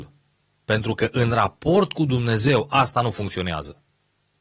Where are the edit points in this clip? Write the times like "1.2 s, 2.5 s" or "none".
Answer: none